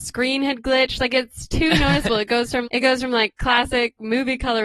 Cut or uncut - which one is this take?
cut